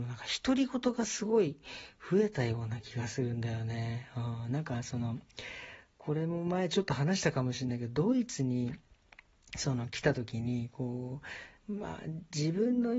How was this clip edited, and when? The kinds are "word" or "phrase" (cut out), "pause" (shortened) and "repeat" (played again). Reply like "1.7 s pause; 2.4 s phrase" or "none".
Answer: 11.6 s pause